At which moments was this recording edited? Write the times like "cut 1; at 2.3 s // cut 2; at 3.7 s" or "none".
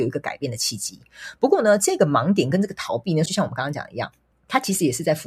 cut 1; at 3.3 s // cut 2; at 4.3 s